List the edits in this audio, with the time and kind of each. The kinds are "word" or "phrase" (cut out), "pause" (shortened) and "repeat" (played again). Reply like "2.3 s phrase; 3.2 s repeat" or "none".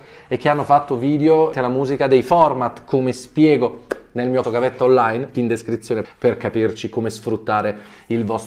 1.5 s word; 4.4 s word; 5.3 s word; 6.0 s word